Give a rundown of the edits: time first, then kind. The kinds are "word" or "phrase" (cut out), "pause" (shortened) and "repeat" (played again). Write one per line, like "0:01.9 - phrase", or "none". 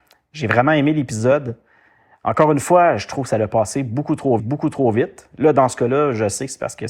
0:04.4 - repeat